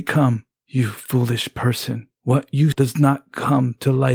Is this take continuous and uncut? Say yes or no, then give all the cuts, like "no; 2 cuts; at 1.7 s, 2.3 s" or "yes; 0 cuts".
no; 1 cut; at 2.7 s